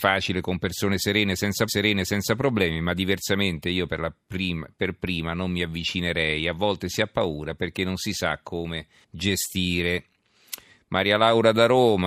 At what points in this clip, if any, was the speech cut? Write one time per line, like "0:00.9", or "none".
0:01.7
0:09.0